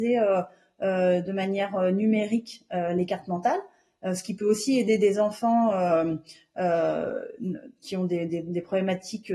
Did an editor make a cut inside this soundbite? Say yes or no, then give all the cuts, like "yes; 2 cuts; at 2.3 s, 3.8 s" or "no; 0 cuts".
no; 0 cuts